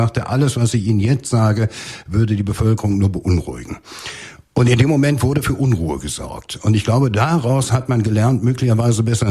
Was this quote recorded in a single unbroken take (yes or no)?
yes